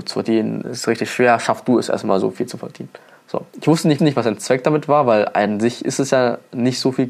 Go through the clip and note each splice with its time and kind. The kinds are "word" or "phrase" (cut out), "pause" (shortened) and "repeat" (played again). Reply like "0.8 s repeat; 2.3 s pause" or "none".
4.0 s repeat